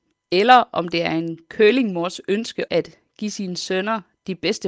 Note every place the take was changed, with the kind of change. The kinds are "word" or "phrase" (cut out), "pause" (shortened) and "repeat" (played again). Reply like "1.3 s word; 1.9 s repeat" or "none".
2.7 s word